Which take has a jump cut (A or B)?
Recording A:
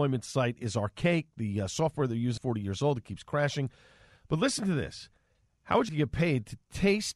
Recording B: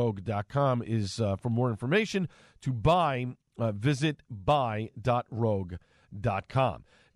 A